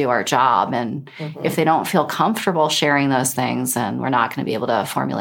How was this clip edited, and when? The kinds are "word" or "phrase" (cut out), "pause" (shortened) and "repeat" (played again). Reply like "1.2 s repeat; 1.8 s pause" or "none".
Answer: none